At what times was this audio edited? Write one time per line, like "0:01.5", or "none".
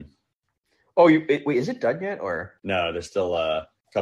0:02.6